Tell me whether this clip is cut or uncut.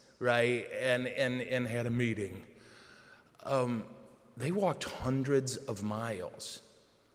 uncut